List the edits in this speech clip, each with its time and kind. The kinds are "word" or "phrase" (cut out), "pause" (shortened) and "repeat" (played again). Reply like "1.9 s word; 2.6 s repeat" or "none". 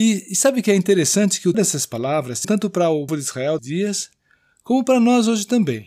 1.5 s word; 2.4 s word; 3.1 s word; 3.6 s word